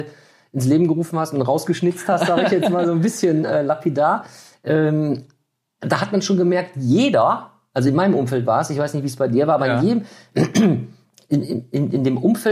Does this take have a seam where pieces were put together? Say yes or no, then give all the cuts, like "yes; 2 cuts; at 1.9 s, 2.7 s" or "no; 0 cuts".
no; 0 cuts